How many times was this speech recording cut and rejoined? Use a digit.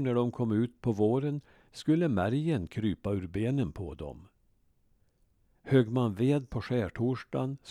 0